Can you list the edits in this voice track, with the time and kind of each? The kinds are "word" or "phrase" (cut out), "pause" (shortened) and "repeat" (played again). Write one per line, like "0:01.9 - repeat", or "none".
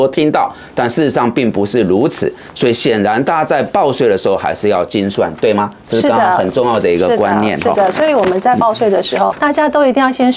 0:09.3 - word